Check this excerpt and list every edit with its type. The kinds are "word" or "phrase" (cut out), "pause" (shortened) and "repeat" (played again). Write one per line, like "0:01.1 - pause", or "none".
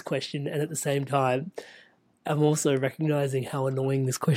none